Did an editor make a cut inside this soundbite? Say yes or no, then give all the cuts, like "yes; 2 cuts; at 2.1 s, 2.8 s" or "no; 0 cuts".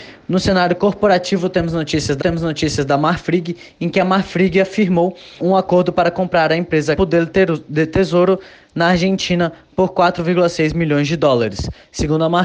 yes; 3 cuts; at 2.2 s, 5.4 s, 7.0 s